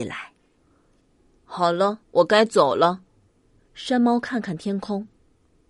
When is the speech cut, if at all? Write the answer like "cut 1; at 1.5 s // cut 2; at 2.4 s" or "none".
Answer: cut 1; at 2.0 s

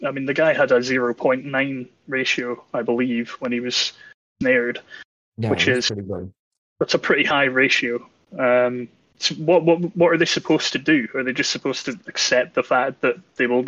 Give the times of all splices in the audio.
none

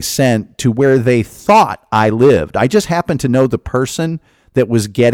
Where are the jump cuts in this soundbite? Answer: none

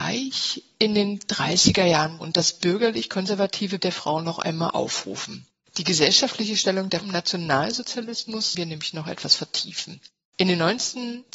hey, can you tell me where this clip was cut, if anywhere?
cut 1; at 2.2 s // cut 2; at 3.8 s // cut 3; at 7.0 s // cut 4; at 8.5 s

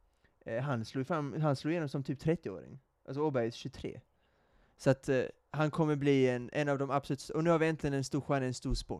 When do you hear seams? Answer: none

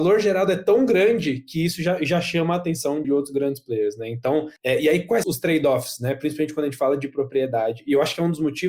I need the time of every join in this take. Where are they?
cut 1; at 3.0 s // cut 2; at 4.6 s // cut 3; at 5.2 s

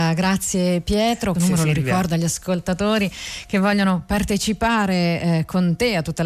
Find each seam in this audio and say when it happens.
cut 1; at 1.3 s

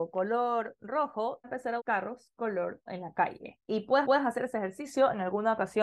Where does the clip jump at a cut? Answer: cut 1; at 1.4 s // cut 2; at 1.8 s // cut 3; at 2.9 s // cut 4; at 3.6 s // cut 5; at 4.0 s

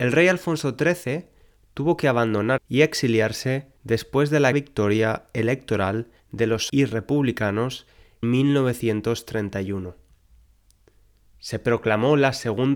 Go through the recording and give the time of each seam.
cut 1; at 2.6 s // cut 2; at 3.8 s // cut 3; at 4.5 s // cut 4; at 6.2 s // cut 5; at 6.7 s // cut 6; at 8.2 s

